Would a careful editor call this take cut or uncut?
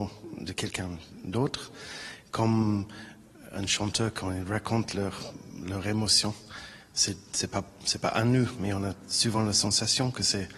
uncut